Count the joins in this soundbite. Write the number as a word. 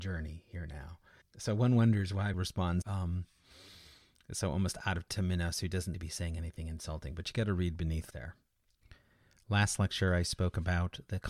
six